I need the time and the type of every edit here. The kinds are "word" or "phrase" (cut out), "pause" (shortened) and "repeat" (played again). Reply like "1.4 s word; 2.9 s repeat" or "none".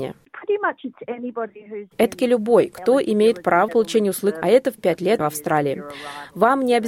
2.2 s word; 3.7 s word; 4.4 s phrase; 4.8 s word; 5.2 s phrase